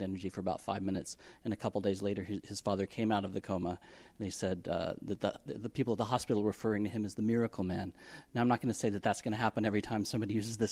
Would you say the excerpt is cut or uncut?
uncut